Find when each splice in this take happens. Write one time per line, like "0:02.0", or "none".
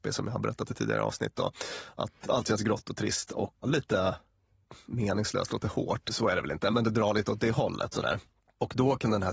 0:03.6
0:06.7